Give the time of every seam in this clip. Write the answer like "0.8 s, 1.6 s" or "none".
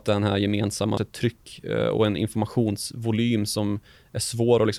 1.0 s